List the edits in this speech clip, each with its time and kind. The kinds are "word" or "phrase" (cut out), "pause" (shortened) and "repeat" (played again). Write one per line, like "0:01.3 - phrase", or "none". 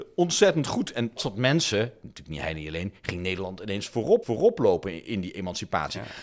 0:01.2 - phrase
0:04.2 - repeat